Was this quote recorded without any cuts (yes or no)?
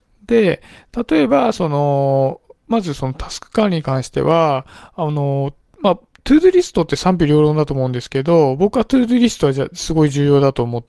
yes